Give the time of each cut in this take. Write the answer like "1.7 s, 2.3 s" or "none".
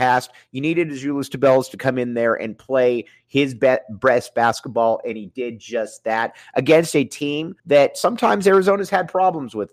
7.6 s